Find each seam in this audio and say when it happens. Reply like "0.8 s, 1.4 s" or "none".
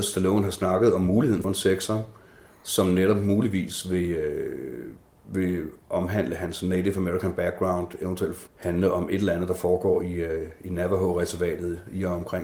1.4 s, 8.5 s